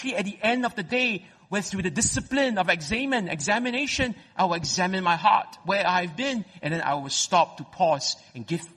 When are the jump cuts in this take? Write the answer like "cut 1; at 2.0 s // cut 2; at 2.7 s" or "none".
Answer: none